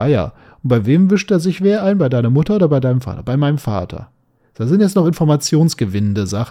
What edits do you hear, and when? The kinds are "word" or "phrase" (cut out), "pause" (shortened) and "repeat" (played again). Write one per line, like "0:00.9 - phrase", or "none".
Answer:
none

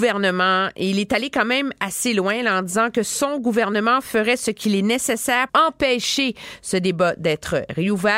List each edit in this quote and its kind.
0:05.5 - word

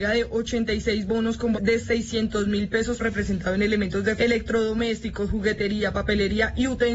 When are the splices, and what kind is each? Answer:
0:01.5 - word
0:03.0 - phrase
0:04.2 - word

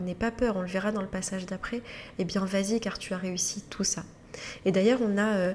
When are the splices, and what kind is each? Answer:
none

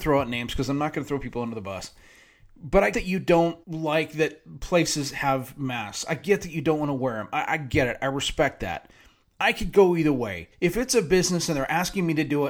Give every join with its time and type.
0:02.9 - word
0:03.6 - pause
0:10.5 - pause

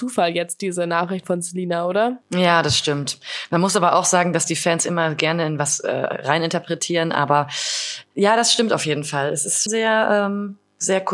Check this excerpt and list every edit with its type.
0:02.2 - pause
0:09.7 - word

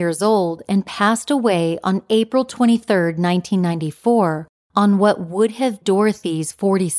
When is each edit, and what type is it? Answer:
0:05.8 - word

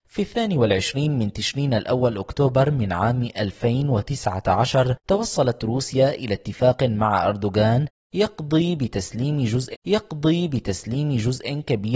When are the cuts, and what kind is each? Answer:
0:05.0 - pause
0:09.7 - repeat

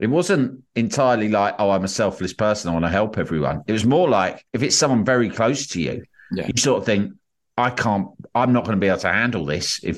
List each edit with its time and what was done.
0:04.5 - pause

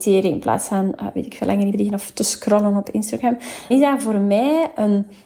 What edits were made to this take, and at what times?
0:01.7 - phrase
0:03.7 - word

